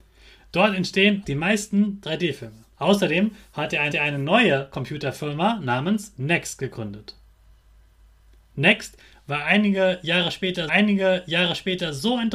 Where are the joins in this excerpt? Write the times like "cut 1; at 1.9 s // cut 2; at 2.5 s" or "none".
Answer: cut 1; at 1.2 s // cut 2; at 2.7 s // cut 3; at 3.9 s // cut 4; at 10.7 s

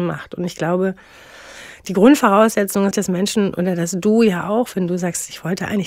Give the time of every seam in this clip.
cut 1; at 2.9 s

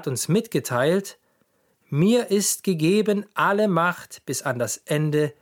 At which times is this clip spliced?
none

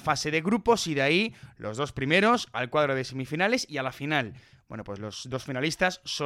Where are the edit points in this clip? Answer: none

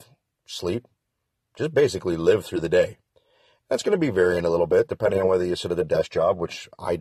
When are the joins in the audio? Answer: none

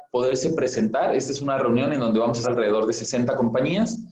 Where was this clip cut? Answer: cut 1; at 2.4 s

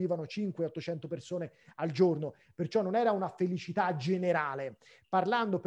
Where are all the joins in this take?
none

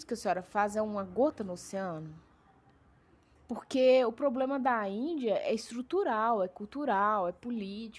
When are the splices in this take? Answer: none

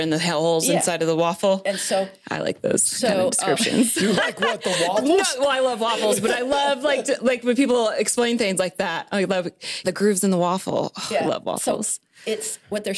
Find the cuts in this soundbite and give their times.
cut 1; at 9.8 s

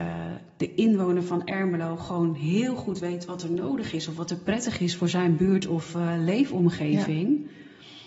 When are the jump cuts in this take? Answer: none

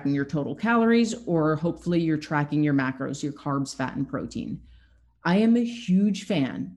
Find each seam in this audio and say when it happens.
none

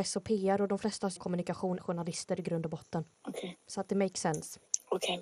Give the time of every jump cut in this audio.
cut 1; at 1.2 s // cut 2; at 1.8 s

